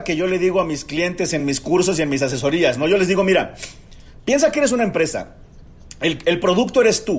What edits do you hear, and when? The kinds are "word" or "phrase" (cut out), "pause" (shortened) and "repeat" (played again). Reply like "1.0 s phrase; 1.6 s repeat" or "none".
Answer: none